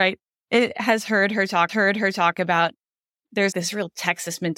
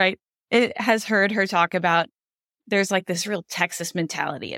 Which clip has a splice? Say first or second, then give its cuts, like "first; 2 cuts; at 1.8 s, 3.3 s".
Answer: first; 2 cuts; at 1.7 s, 3.5 s